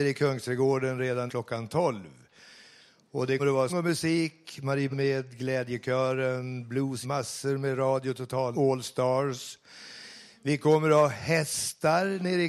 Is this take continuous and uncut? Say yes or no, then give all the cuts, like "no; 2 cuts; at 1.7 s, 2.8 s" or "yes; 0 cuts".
no; 6 cuts; at 1.3 s, 3.4 s, 3.7 s, 4.9 s, 7.0 s, 8.5 s